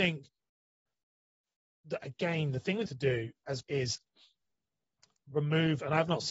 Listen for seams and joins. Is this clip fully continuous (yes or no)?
no